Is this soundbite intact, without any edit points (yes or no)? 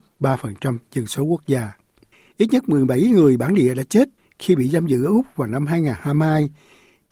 yes